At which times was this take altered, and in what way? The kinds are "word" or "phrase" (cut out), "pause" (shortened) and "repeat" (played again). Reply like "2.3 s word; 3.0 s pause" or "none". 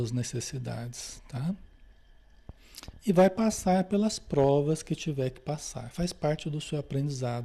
none